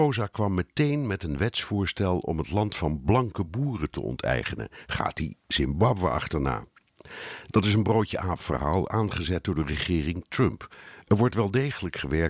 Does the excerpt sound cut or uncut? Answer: uncut